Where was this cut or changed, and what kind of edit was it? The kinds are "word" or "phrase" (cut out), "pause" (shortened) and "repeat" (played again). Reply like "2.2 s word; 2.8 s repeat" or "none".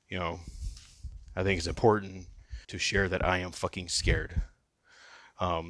2.6 s pause

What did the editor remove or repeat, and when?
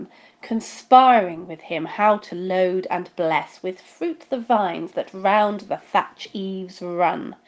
none

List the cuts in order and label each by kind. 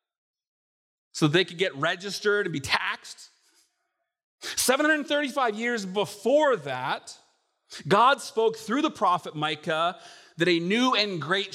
none

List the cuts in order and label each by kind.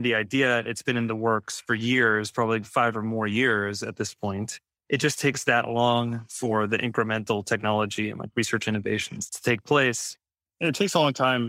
none

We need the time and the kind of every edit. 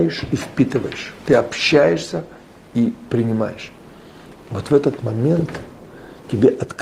none

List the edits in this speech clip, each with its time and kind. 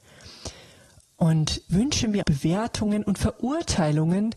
1.7 s word; 2.2 s word

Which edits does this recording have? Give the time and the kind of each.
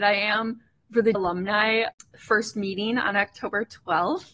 1.1 s word

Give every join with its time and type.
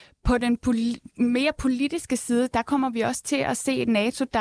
none

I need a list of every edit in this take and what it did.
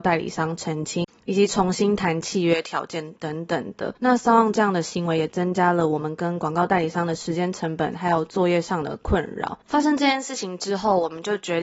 4.0 s pause; 9.6 s pause

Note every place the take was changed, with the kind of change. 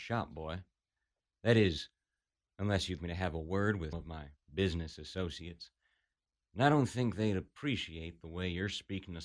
3.0 s word; 3.9 s word

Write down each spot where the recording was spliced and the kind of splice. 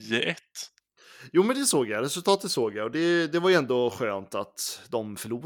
none

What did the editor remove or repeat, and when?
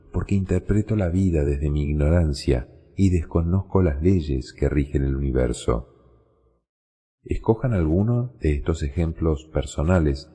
none

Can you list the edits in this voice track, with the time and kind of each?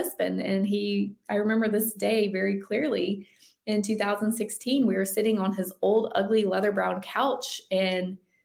none

